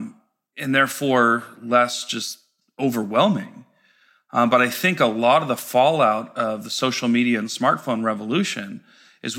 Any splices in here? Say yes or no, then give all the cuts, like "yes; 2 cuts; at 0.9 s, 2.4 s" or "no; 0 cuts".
no; 0 cuts